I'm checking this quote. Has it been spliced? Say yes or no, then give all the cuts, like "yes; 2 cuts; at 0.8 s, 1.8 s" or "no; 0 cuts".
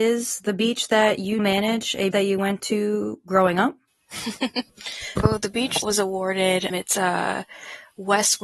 yes; 5 cuts; at 1.4 s, 2.1 s, 5.2 s, 5.8 s, 6.7 s